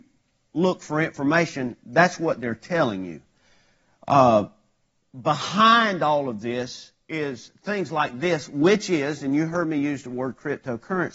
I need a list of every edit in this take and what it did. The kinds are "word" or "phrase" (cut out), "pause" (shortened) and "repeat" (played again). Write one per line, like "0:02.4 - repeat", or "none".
none